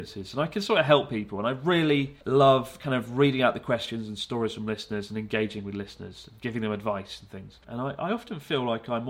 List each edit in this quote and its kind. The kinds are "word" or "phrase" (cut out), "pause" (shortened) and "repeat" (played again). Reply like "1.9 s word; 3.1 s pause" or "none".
2.2 s pause; 7.6 s pause

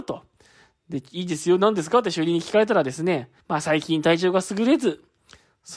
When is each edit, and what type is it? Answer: 3.4 s pause

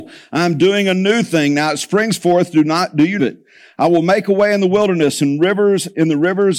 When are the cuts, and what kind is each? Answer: 3.2 s phrase

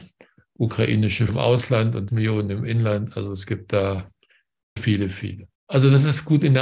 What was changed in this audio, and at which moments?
1.3 s word; 2.1 s word; 4.8 s word; 5.5 s pause

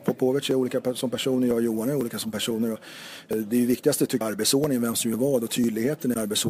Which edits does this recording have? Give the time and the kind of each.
3.3 s word; 4.2 s word

